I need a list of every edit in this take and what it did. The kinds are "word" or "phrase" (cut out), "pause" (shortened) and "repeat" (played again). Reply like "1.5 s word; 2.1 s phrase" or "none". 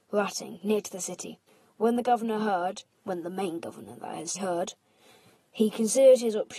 1.5 s pause; 2.9 s pause; 4.4 s word